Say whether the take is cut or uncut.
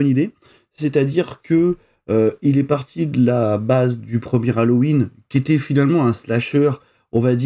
uncut